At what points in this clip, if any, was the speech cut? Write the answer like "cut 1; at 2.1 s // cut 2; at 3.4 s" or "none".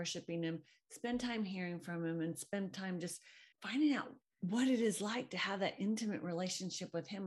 cut 1; at 3.5 s // cut 2; at 4.2 s